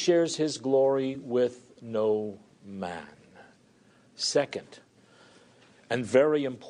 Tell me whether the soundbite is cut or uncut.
uncut